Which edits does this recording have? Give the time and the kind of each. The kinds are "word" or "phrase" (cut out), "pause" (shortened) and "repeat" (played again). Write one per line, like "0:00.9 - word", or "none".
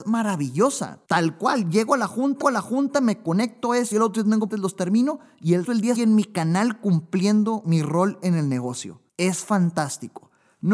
0:01.0 - pause
0:02.4 - repeat
0:03.9 - word
0:04.5 - word
0:05.6 - word
0:06.0 - word
0:09.1 - pause